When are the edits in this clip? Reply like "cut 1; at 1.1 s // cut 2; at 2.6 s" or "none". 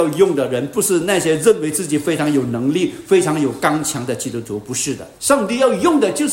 cut 1; at 5.2 s